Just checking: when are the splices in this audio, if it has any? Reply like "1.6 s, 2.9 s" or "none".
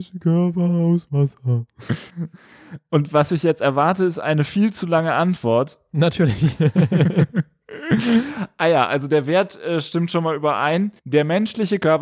2.1 s, 11.0 s